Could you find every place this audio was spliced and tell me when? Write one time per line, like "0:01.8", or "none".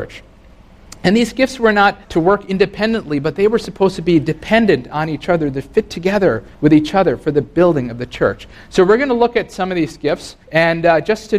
0:02.0
0:06.5
0:10.4